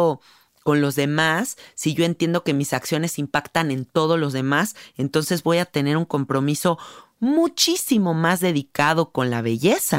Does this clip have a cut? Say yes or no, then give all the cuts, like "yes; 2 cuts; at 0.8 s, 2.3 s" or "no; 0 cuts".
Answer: no; 0 cuts